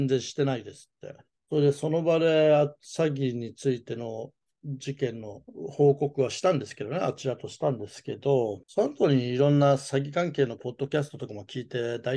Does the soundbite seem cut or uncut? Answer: uncut